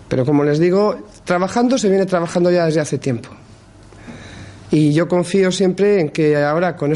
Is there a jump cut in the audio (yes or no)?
no